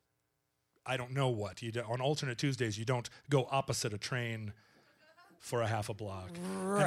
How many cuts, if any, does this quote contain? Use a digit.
0